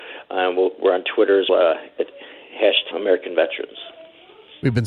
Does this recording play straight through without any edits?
no; 2 cuts; at 1.5 s, 2.9 s

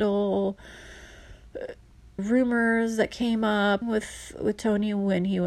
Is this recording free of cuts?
no; 2 cuts; at 2.2 s, 3.8 s

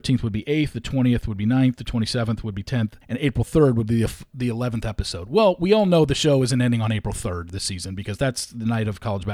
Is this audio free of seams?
no; 1 cut; at 3.0 s

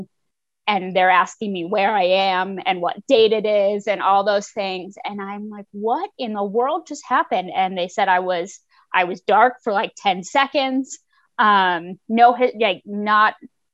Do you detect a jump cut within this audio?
no; 0 cuts

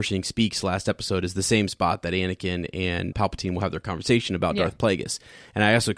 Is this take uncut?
no; 1 cut; at 3.1 s

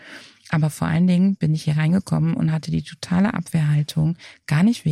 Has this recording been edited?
no; 0 cuts

